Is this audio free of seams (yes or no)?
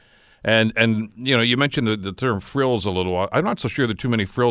yes